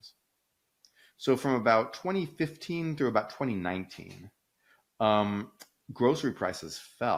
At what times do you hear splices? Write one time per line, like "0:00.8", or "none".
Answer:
none